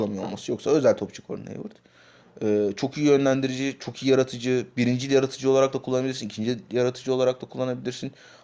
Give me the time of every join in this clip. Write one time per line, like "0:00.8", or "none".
none